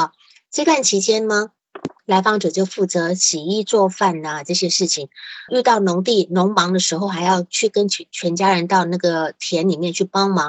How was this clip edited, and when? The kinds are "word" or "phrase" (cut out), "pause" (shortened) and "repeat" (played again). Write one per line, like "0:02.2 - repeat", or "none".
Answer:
0:02.0 - pause
0:05.5 - word